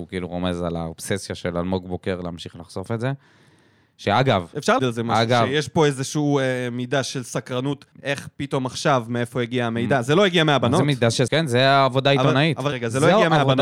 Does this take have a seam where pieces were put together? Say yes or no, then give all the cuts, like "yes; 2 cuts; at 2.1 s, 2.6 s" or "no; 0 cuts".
yes; 4 cuts; at 4.8 s, 7.9 s, 11.3 s, 12.7 s